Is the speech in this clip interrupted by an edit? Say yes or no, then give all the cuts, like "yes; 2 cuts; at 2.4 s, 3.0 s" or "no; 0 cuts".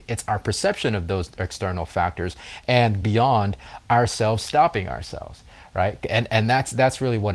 yes; 1 cut; at 3.0 s